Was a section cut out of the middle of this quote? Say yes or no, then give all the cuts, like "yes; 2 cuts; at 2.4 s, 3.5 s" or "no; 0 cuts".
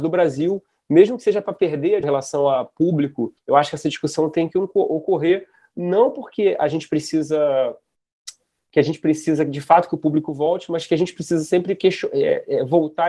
yes; 2 cuts; at 2.0 s, 3.4 s